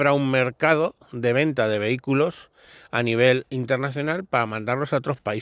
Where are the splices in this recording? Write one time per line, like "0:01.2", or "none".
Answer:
none